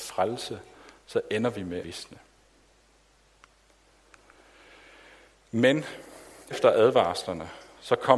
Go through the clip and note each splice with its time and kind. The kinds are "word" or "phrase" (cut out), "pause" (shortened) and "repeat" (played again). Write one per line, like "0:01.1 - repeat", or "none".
0:01.8 - word
0:06.5 - word